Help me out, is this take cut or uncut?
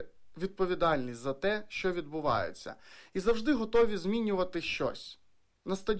uncut